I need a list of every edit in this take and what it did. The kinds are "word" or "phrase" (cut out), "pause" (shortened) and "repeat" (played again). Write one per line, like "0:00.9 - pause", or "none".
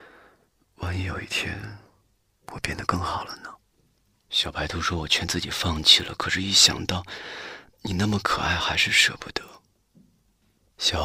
none